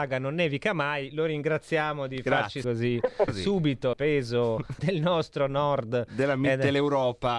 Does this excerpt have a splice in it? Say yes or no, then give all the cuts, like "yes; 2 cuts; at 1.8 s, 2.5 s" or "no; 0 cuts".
yes; 4 cuts; at 2.6 s, 3.3 s, 3.9 s, 4.8 s